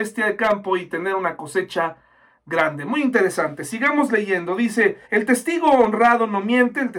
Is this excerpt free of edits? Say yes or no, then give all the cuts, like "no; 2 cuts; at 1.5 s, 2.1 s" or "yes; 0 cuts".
no; 1 cut; at 5.0 s